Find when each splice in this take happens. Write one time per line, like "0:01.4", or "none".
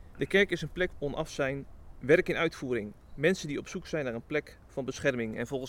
0:00.9